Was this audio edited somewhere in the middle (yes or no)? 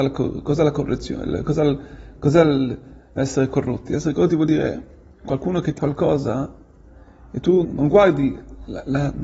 yes